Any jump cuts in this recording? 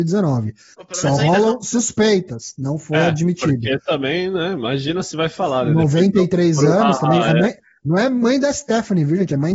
no; 0 cuts

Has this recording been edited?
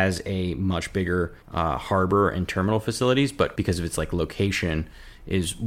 yes; 2 cuts; at 1.4 s, 3.6 s

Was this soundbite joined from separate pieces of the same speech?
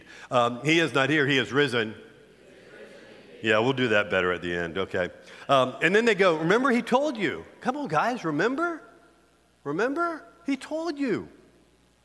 no; 0 cuts

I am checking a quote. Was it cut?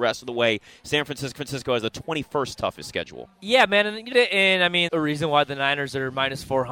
yes; 3 cuts; at 1.4 s, 4.1 s, 4.9 s

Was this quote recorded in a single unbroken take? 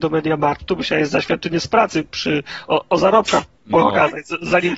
yes; 0 cuts

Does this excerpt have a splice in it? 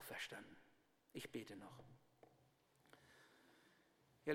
no; 0 cuts

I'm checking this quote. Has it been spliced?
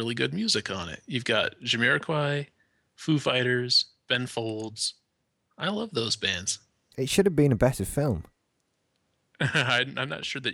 no; 0 cuts

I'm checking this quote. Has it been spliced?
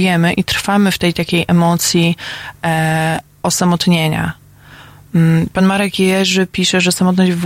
no; 0 cuts

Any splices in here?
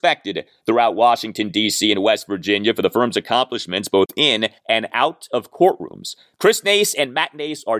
yes; 1 cut; at 4.6 s

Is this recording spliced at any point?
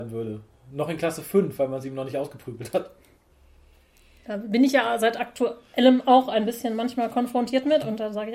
no; 0 cuts

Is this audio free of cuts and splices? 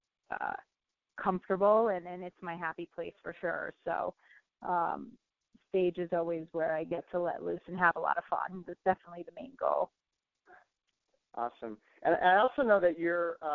yes; 0 cuts

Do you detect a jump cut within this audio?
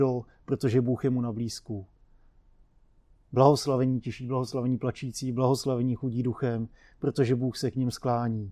no; 0 cuts

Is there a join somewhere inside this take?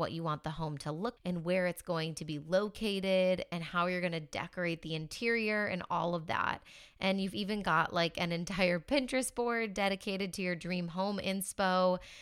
yes; 1 cut; at 1.2 s

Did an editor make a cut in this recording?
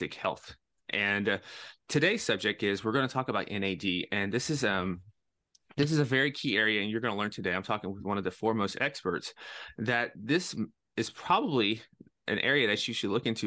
no; 0 cuts

